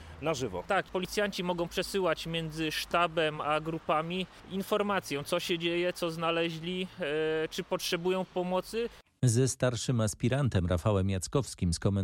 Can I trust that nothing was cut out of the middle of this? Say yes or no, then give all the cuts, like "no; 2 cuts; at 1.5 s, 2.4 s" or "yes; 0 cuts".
yes; 0 cuts